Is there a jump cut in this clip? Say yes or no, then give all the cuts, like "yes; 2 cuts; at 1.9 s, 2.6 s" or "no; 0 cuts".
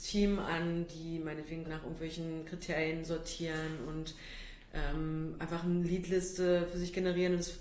yes; 1 cut; at 1.7 s